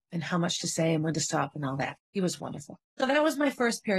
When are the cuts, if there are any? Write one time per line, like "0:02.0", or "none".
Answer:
0:02.0
0:02.8